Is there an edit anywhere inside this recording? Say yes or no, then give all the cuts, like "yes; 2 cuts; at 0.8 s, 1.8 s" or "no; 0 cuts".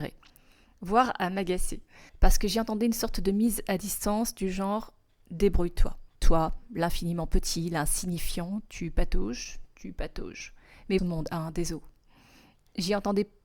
yes; 3 cuts; at 2.1 s, 6.1 s, 11.0 s